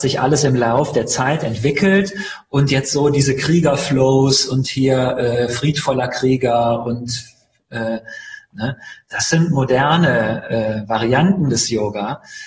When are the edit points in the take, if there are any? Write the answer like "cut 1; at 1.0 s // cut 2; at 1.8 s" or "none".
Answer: none